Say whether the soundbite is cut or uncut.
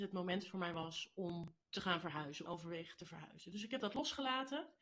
cut